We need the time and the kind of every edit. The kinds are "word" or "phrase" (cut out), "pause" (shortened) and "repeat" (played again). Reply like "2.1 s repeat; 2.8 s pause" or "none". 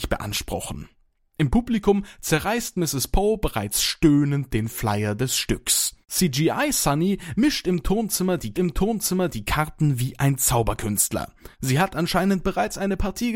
6.0 s pause; 8.5 s repeat; 11.5 s pause